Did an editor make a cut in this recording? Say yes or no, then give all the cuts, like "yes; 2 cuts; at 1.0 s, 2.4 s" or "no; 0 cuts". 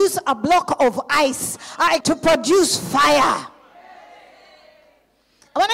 yes; 1 cut; at 2.0 s